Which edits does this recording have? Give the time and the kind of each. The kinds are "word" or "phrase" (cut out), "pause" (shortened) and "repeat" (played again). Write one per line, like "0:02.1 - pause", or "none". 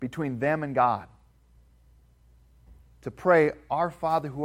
none